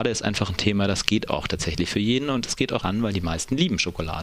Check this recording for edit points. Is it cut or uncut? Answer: cut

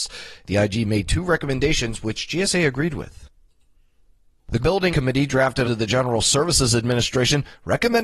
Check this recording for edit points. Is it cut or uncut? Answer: cut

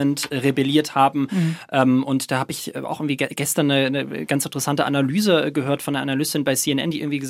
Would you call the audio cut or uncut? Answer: uncut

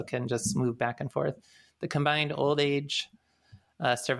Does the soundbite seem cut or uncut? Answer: uncut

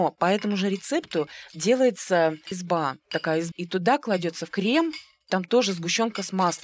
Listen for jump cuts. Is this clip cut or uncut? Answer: cut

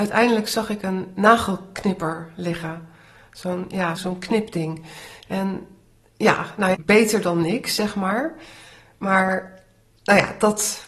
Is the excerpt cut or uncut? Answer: cut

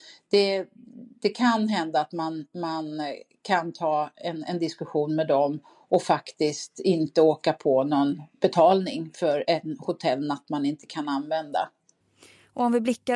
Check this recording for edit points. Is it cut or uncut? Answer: uncut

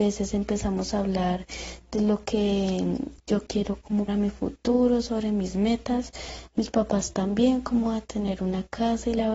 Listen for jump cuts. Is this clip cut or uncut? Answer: cut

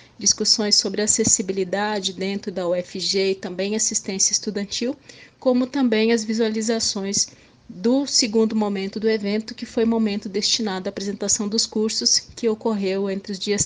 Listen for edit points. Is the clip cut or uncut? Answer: uncut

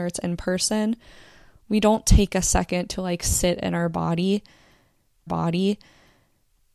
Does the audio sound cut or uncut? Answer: cut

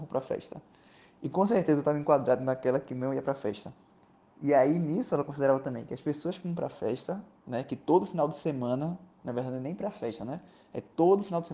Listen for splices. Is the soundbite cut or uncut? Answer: uncut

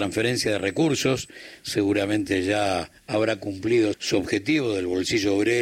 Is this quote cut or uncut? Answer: cut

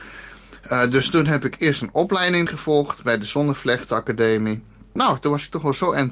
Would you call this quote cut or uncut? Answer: cut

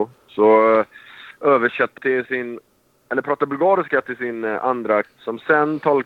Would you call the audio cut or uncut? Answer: cut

